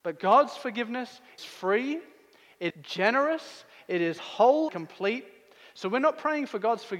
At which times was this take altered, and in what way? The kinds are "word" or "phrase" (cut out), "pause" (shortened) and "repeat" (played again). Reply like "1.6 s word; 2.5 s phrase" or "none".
1.4 s word; 2.7 s word; 4.7 s word